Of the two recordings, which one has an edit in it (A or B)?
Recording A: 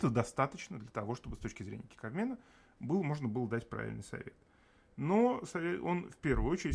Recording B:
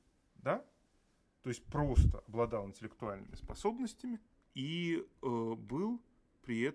B